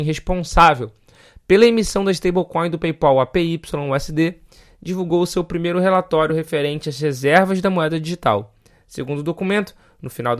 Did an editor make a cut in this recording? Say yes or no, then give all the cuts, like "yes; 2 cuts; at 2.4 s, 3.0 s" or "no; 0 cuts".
no; 0 cuts